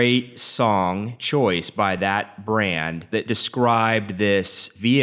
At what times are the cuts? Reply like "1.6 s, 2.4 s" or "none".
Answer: none